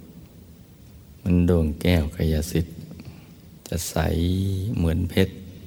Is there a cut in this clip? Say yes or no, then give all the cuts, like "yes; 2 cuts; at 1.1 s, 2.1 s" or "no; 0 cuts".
yes; 2 cuts; at 1.2 s, 3.6 s